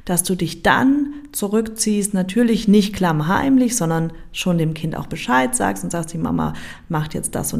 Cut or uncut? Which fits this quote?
uncut